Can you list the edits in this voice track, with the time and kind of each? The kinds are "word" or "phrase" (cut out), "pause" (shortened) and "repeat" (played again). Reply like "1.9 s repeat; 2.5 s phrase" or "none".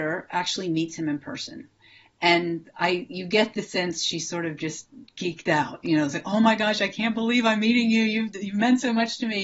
none